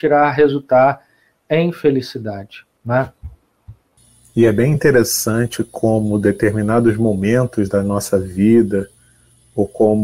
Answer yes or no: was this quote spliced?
no